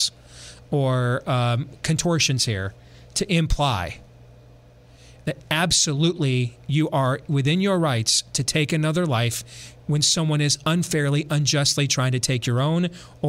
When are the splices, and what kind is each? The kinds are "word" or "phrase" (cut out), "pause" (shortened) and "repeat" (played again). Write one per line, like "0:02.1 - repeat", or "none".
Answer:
none